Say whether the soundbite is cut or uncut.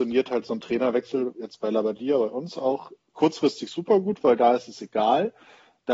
uncut